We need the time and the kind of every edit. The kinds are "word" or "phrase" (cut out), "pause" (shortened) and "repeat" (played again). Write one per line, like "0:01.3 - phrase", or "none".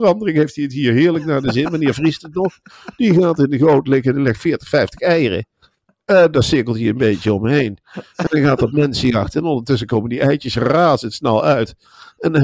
none